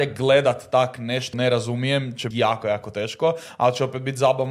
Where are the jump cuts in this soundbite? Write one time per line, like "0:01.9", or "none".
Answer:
0:01.3
0:02.3